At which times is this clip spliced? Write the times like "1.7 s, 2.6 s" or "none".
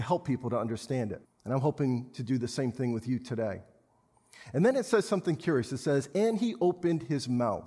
1.2 s